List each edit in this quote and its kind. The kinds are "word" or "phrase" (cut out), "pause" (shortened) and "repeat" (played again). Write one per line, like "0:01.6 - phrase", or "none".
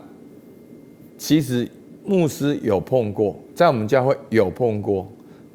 0:02.0 - pause